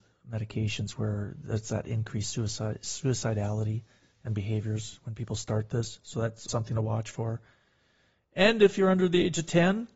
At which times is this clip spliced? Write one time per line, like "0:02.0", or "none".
0:06.5